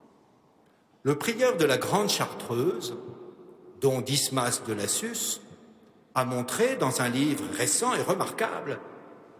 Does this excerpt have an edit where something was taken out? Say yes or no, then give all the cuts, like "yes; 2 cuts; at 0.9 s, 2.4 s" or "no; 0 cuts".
no; 0 cuts